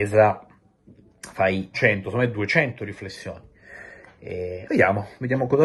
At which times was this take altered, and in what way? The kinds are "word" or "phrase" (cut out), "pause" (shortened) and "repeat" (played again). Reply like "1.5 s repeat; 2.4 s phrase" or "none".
1.7 s word